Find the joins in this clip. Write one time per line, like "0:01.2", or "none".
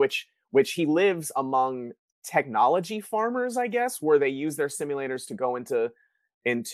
0:02.1

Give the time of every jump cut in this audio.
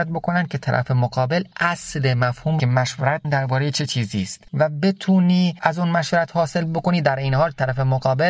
0:01.5
0:02.6
0:03.2
0:05.6

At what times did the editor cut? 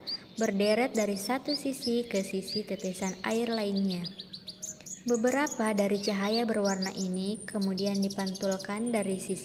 none

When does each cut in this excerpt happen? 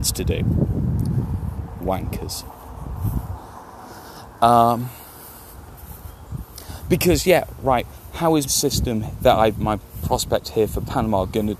0:08.5

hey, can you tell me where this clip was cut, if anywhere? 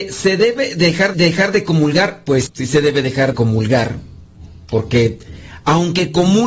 0:01.1
0:02.5
0:03.3

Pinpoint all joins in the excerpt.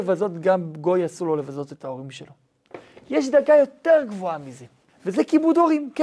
0:04.9

